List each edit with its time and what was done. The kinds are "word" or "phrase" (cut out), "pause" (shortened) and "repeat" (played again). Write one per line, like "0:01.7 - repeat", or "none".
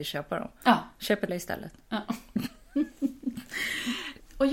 0:01.3 - word